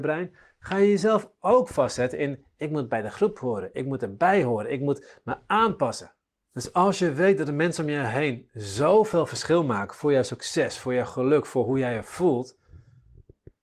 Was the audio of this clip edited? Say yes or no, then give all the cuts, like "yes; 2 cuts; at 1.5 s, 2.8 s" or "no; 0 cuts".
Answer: no; 0 cuts